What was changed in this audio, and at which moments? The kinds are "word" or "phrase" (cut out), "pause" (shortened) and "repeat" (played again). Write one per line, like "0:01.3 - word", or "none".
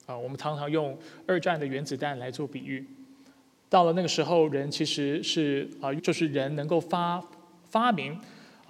0:06.0 - word